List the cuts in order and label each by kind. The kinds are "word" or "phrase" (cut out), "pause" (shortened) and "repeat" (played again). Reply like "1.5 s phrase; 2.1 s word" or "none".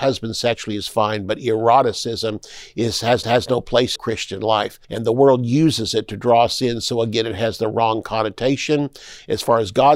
3.2 s repeat; 4.0 s phrase; 4.8 s pause